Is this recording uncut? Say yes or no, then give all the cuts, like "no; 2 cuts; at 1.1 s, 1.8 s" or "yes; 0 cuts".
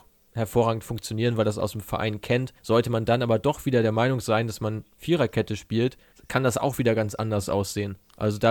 no; 2 cuts; at 2.6 s, 6.1 s